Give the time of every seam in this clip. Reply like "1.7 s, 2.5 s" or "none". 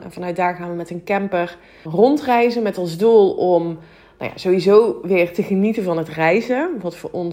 1.9 s